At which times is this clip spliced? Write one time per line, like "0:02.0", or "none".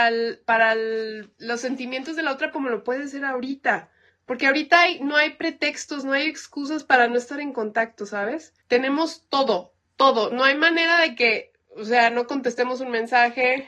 0:01.3
0:02.5
0:04.1
0:08.6